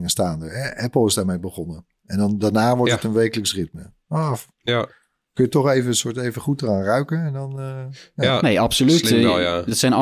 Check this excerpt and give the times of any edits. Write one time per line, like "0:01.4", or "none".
0:04.5